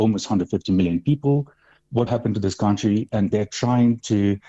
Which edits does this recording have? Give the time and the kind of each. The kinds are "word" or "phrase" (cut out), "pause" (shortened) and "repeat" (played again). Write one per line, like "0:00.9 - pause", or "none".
0:02.1 - word
0:03.3 - word